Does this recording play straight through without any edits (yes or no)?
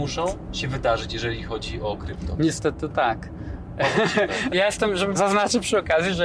no